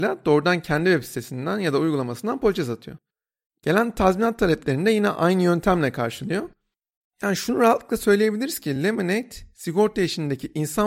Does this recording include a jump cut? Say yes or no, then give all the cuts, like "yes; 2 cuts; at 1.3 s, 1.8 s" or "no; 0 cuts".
no; 0 cuts